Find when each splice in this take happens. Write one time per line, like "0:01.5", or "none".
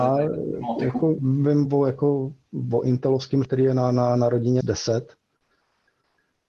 0:01.2
0:01.7
0:03.4
0:04.6